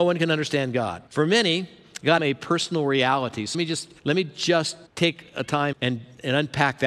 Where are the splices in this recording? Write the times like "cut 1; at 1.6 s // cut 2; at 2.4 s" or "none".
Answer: cut 1; at 1.1 s // cut 2; at 2.2 s // cut 3; at 3.5 s // cut 4; at 4.0 s // cut 5; at 4.9 s // cut 6; at 5.7 s